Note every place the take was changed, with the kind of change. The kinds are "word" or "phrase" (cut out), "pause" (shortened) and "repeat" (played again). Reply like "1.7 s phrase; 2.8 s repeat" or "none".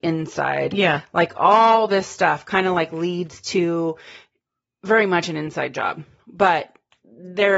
none